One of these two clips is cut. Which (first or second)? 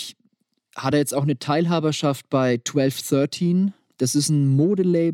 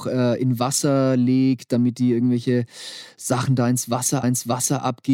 second